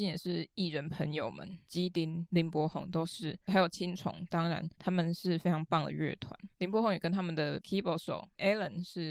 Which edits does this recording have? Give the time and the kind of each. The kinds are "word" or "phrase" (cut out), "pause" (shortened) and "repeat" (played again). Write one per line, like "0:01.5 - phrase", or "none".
0:04.7 - pause
0:06.5 - pause